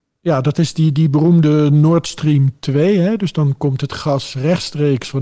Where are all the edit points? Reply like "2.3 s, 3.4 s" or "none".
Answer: none